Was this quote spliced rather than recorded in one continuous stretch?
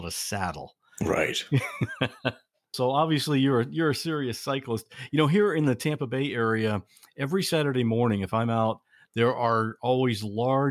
no; 0 cuts

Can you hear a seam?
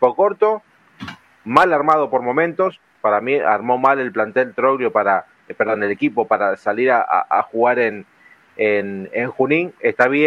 no; 0 cuts

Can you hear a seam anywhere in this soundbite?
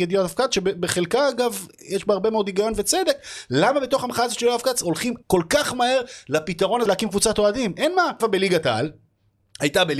yes; 3 cuts; at 5.2 s, 6.9 s, 8.2 s

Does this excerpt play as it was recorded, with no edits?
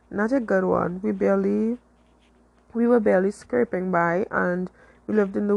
yes; 0 cuts

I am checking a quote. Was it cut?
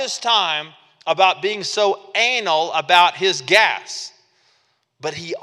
no; 0 cuts

